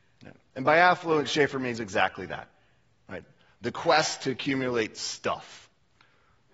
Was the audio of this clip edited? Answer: no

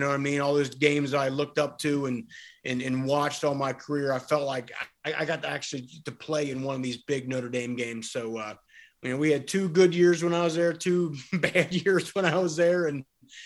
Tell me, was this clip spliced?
no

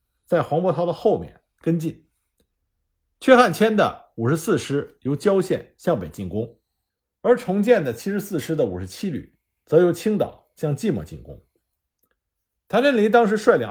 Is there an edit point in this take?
no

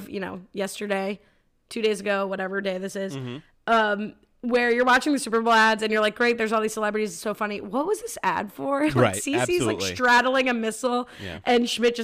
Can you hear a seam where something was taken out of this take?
no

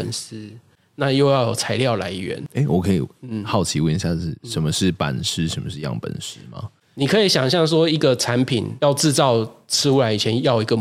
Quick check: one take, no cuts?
yes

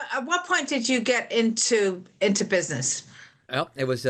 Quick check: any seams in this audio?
no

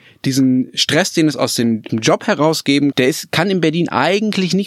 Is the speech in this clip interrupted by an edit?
yes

